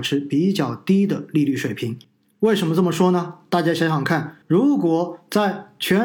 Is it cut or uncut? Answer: cut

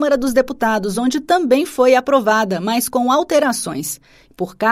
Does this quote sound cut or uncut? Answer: uncut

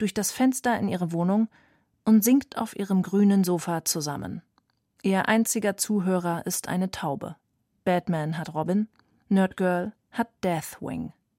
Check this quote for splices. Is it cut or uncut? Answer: uncut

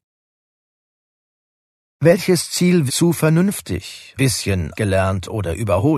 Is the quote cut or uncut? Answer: cut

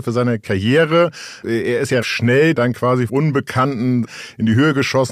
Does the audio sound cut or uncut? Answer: cut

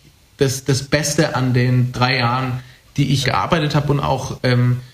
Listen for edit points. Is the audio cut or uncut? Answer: cut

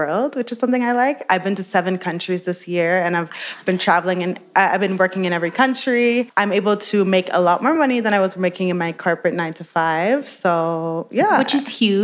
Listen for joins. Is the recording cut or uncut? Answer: uncut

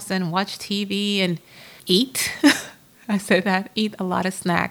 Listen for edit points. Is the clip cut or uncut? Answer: cut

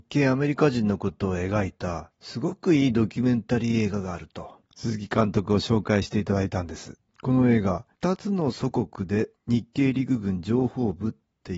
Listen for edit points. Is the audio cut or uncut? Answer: cut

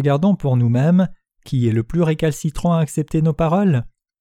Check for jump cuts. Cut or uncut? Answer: uncut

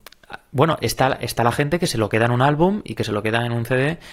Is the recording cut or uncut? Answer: uncut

